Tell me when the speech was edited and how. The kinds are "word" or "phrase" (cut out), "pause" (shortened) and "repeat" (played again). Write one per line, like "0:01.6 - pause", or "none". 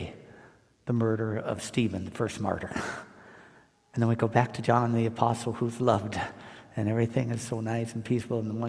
none